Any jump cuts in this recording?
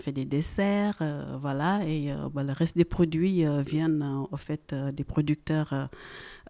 no; 0 cuts

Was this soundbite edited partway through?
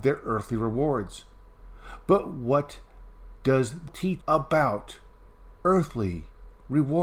yes; 2 cuts; at 3.9 s, 4.2 s

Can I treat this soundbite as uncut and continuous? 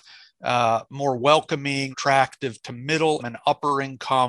no; 2 cuts; at 1.9 s, 3.2 s

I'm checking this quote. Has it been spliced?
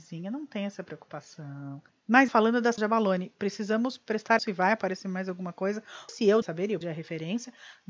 yes; 6 cuts; at 2.3 s, 2.8 s, 4.4 s, 6.1 s, 6.4 s, 6.8 s

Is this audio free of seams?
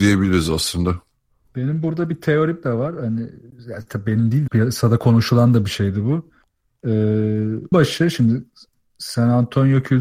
no; 2 cuts; at 4.5 s, 7.7 s

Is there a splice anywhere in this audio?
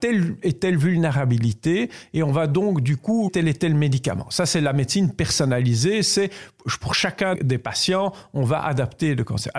yes; 2 cuts; at 3.3 s, 7.3 s

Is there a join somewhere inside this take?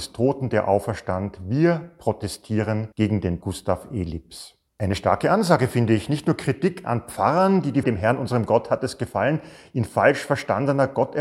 yes; 4 cuts; at 2.9 s, 3.4 s, 4.7 s, 7.8 s

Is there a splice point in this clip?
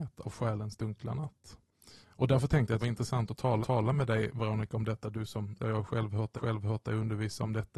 yes; 5 cuts; at 2.0 s, 2.8 s, 3.6 s, 5.6 s, 6.4 s

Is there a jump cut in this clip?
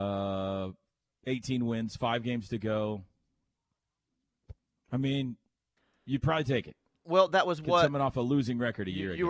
no; 0 cuts

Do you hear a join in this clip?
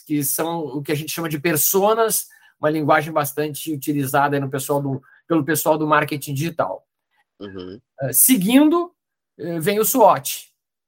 no; 0 cuts

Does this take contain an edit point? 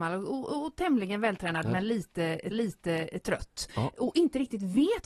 yes; 1 cut; at 2.5 s

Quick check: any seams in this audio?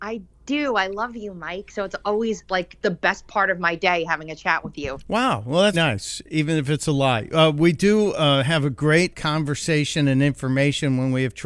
yes; 3 cuts; at 2.5 s, 5.7 s, 9.1 s

